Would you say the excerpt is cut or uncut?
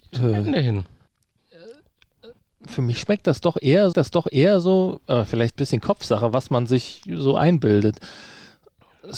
cut